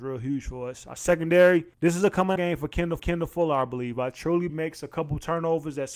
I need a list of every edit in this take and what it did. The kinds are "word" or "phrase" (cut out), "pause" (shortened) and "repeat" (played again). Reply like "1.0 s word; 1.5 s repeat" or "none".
1.7 s pause; 2.4 s word; 3.0 s repeat; 4.5 s phrase